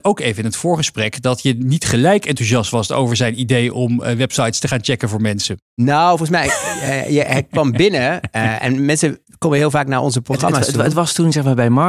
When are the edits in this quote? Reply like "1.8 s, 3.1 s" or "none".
5.6 s